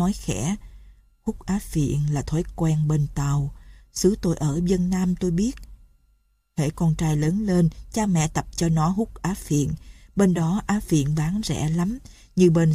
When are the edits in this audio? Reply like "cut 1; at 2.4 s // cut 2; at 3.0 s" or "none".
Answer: none